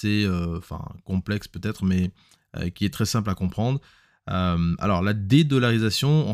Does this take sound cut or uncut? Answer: uncut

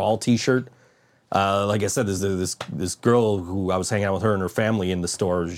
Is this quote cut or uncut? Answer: uncut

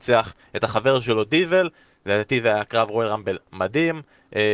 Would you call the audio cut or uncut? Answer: uncut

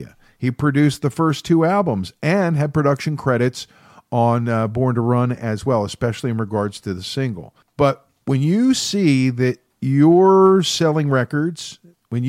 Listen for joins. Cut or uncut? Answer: uncut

